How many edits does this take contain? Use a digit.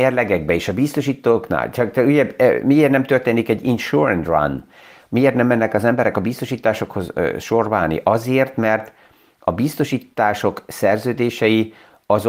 0